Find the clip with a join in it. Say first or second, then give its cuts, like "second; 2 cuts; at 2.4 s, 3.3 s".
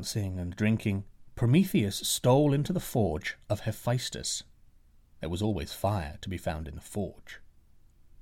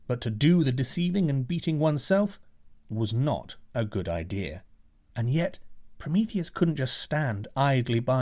second; 1 cut; at 4.9 s